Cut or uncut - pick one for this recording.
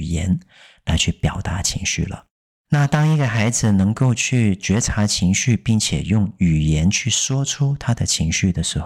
cut